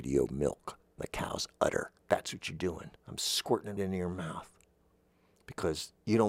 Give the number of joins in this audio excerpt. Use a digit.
4